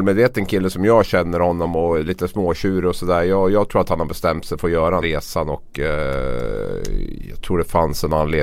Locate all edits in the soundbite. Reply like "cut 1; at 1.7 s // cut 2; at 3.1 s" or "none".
cut 1; at 5.0 s

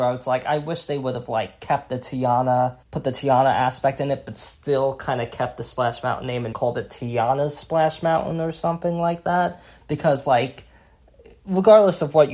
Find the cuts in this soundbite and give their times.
cut 1; at 2.8 s // cut 2; at 6.5 s

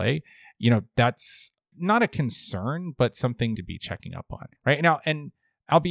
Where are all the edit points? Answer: cut 1; at 1.7 s // cut 2; at 3.5 s // cut 3; at 4.6 s

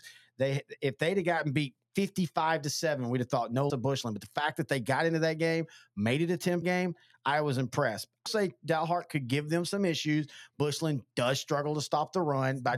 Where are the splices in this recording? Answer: cut 1; at 3.7 s // cut 2; at 6.6 s // cut 3; at 8.3 s

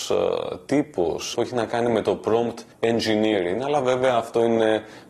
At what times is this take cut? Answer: cut 1; at 1.3 s // cut 2; at 2.7 s

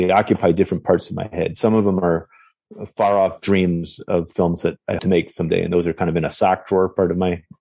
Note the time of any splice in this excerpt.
cut 1; at 5.0 s

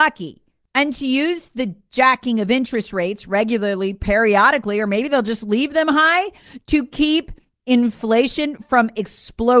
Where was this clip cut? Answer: none

